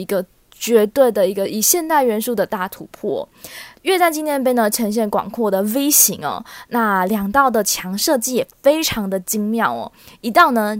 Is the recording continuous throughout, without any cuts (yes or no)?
no